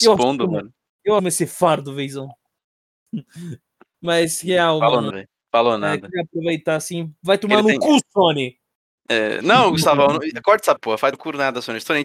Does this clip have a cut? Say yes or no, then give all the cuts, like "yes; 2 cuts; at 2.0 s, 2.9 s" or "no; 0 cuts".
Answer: yes; 4 cuts; at 1.2 s, 5.1 s, 10.8 s, 11.1 s